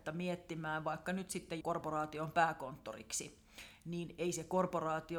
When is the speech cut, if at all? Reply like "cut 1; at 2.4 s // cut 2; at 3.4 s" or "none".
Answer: cut 1; at 1.6 s